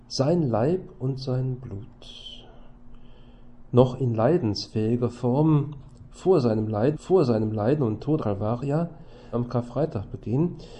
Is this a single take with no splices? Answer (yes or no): no